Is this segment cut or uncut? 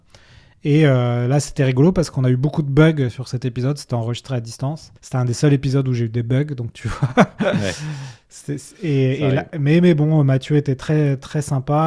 cut